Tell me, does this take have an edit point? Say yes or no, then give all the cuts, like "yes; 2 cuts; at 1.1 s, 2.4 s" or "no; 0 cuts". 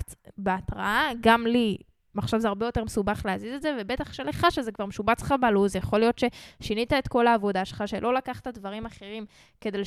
no; 0 cuts